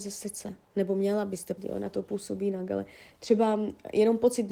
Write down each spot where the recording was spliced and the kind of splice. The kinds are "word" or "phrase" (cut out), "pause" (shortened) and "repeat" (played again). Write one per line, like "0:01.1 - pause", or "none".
0:01.6 - word
0:01.9 - word